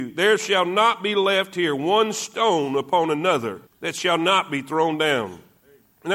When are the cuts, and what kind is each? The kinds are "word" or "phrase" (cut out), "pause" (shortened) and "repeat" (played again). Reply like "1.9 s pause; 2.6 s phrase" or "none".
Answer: 3.7 s pause